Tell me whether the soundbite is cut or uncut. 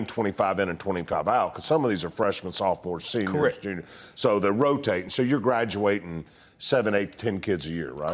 uncut